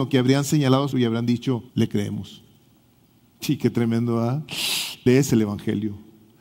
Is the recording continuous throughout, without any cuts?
no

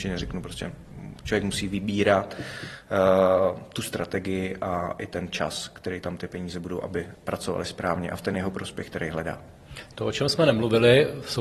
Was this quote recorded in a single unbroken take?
yes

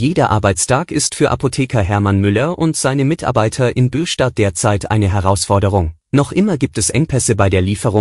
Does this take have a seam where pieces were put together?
yes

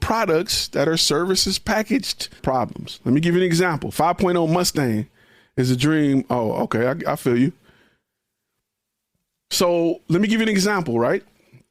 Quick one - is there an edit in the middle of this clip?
yes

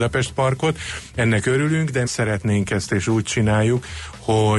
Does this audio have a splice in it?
yes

